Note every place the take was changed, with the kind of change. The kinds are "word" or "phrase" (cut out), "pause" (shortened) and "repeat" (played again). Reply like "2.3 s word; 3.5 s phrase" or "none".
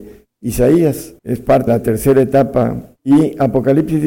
1.2 s pause; 1.7 s word; 3.0 s pause

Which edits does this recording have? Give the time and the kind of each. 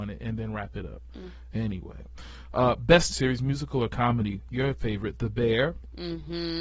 3.1 s word

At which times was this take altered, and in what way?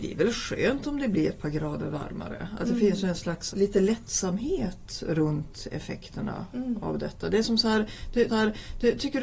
3.5 s word; 8.3 s repeat

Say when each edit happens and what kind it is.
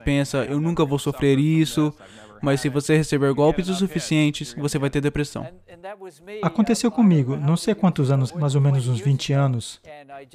8.3 s word

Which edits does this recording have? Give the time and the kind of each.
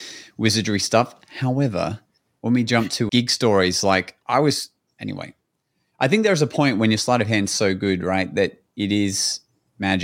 3.1 s word; 4.2 s pause

